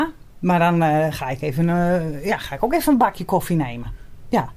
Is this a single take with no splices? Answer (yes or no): yes